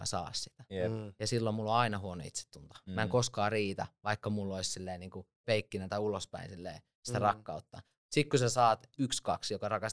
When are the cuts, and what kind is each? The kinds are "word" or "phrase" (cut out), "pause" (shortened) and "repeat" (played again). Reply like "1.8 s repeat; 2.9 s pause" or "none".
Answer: none